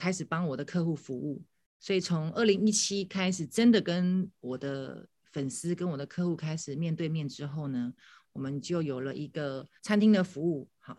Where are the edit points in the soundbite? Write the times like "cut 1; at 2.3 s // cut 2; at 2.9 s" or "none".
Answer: cut 1; at 9.8 s